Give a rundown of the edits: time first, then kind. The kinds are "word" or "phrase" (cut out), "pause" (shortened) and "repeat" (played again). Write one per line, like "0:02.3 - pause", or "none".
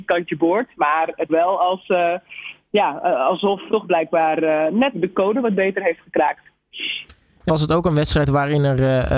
0:01.3 - word
0:03.7 - word
0:04.9 - word
0:07.5 - word